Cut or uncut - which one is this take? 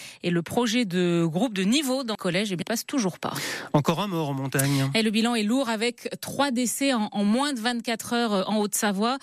cut